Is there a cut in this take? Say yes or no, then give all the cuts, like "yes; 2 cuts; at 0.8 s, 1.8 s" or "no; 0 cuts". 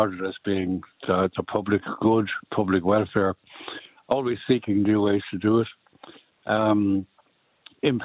no; 0 cuts